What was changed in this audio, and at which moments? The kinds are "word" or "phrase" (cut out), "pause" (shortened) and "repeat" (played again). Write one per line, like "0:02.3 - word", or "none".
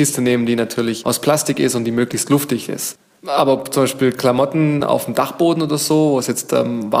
none